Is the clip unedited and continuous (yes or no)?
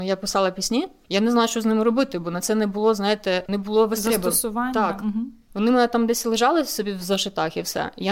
yes